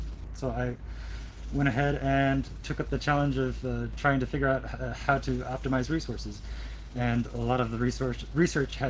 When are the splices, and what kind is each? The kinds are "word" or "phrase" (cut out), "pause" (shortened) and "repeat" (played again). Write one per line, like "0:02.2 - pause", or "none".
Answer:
none

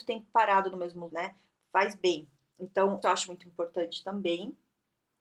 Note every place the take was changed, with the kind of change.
0:01.1 - word
0:03.0 - word

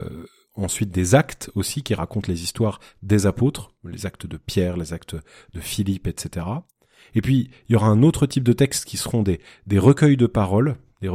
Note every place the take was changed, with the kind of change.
none

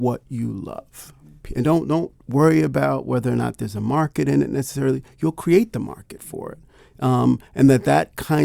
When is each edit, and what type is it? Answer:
none

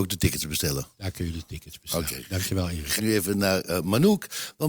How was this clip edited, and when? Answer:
0:03.0 - word

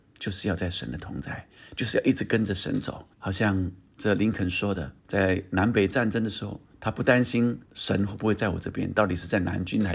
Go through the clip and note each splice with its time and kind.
0:03.1 - pause
0:05.0 - pause
0:06.7 - pause
0:07.7 - pause

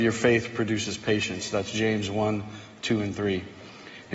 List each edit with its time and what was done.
none

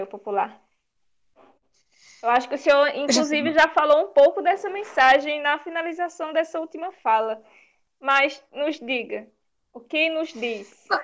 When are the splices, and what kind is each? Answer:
none

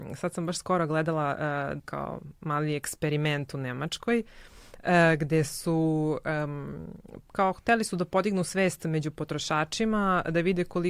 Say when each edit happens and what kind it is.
0:01.8 - phrase

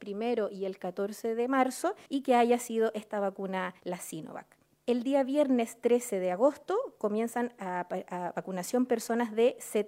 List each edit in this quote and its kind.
0:02.1 - pause
0:03.8 - pause
0:04.6 - pause

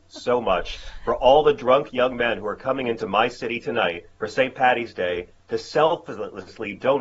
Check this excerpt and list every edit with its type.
0:04.1 - pause

